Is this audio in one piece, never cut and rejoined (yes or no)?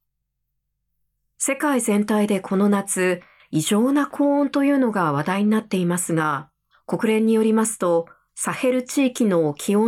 no